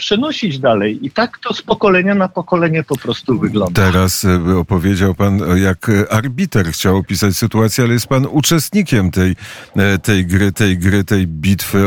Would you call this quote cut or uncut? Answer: cut